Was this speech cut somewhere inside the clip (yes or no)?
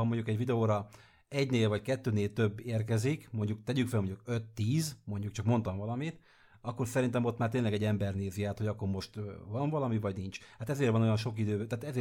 no